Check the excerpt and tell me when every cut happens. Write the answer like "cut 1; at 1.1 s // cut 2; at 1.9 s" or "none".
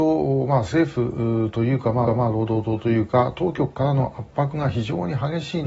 cut 1; at 2.1 s